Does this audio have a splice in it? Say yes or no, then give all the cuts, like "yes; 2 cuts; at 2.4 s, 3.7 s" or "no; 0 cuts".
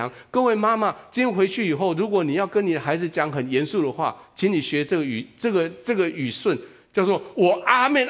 no; 0 cuts